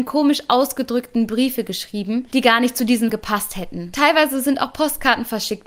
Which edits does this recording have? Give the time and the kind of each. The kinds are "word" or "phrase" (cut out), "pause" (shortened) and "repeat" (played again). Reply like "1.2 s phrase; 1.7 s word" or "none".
3.1 s word